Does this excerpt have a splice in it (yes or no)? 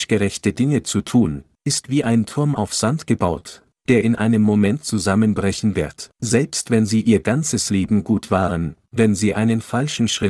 yes